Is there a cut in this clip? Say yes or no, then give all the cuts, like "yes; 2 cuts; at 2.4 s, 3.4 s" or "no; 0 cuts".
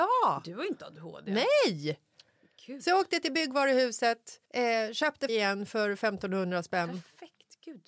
yes; 2 cuts; at 4.5 s, 5.3 s